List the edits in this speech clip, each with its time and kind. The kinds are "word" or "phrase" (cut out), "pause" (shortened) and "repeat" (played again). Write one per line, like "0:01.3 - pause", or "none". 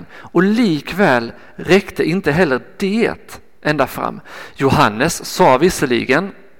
none